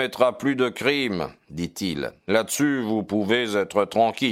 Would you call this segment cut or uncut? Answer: uncut